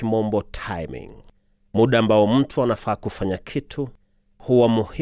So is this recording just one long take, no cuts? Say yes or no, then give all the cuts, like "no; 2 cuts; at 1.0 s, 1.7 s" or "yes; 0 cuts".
yes; 0 cuts